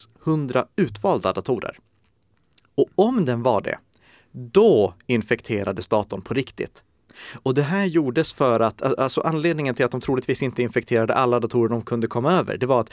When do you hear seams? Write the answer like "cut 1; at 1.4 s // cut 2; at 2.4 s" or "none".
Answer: none